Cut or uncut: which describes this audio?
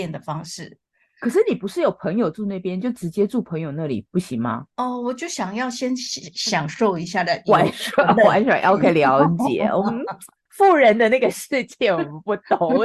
cut